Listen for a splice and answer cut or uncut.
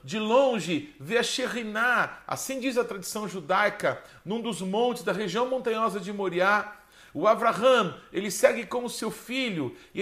uncut